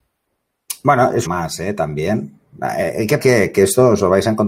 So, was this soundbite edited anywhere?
yes; 2 cuts; at 1.3 s, 3.2 s

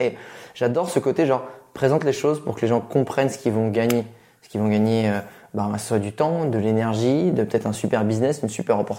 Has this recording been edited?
no; 0 cuts

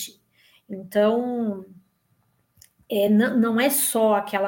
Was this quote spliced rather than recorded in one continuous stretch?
no; 0 cuts

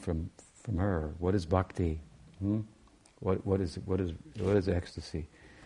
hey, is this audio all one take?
yes; 0 cuts

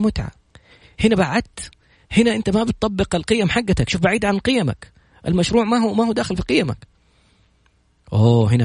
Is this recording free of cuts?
yes; 0 cuts

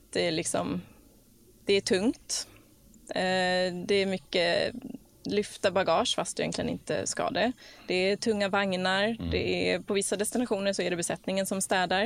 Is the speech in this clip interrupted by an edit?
no; 0 cuts

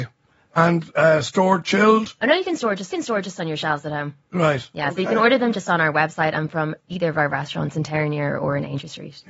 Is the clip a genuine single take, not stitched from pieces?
no; 1 cut; at 2.9 s

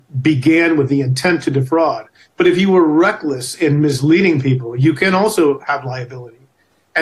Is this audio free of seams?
yes; 0 cuts

